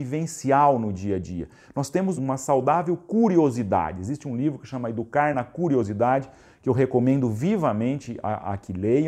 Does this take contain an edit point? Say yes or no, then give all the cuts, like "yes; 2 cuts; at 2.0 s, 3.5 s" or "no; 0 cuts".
no; 0 cuts